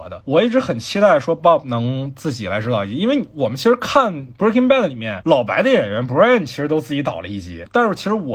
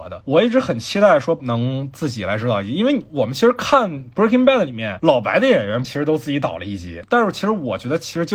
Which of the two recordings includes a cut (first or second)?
second